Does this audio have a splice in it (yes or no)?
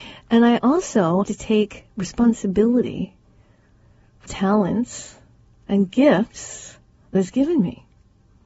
yes